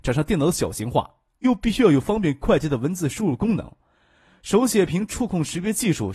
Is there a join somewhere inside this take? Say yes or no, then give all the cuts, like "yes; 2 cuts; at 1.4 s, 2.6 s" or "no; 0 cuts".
no; 0 cuts